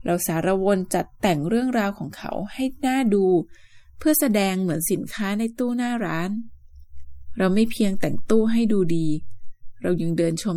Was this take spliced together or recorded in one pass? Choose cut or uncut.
uncut